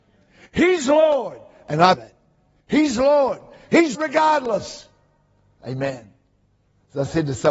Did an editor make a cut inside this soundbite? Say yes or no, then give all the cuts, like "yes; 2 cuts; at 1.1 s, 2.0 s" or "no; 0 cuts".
yes; 2 cuts; at 1.9 s, 3.9 s